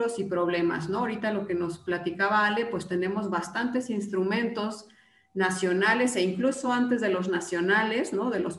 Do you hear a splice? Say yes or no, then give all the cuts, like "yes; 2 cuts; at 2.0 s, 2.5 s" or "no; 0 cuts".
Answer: no; 0 cuts